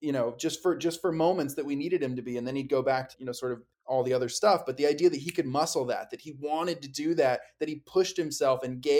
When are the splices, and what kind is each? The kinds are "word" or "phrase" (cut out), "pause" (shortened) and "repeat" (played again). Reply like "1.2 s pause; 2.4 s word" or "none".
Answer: 3.1 s word; 3.7 s pause

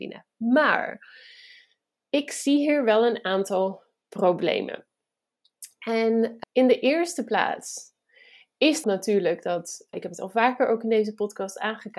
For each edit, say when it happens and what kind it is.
6.4 s word; 8.8 s word; 9.9 s word

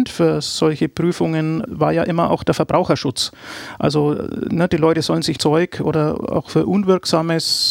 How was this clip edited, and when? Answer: 1.7 s word; 5.4 s phrase

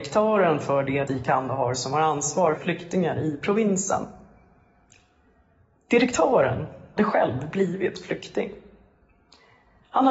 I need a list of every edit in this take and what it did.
1.1 s word; 2.6 s word; 7.0 s word

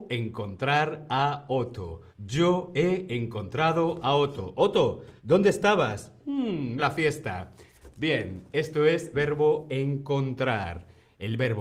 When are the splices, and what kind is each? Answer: 2.1 s pause; 5.2 s pause; 6.8 s phrase; 9.1 s word

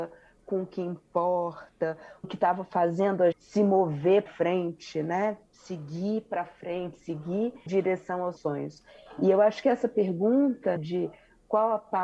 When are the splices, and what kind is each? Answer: 2.2 s word; 3.3 s word; 4.3 s word; 7.7 s word; 8.4 s word; 10.8 s word

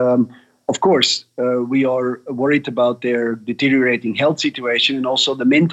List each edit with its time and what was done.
none

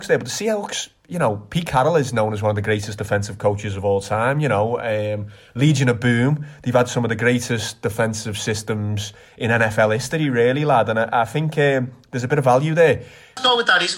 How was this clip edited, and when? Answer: none

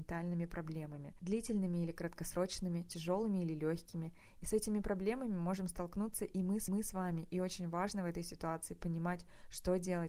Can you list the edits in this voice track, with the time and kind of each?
1.2 s word; 6.7 s repeat

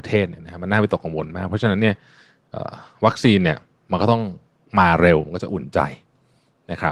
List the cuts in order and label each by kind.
none

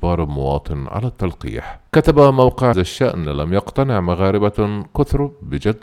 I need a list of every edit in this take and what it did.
1.9 s pause; 2.7 s phrase

